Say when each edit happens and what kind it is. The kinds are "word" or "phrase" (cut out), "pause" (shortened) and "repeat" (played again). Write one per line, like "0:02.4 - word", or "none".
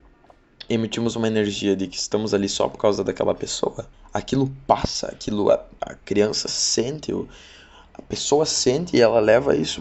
0:03.9 - pause